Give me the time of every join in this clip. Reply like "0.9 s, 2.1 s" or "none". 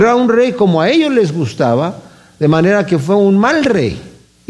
none